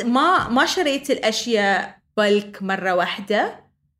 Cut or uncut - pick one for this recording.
uncut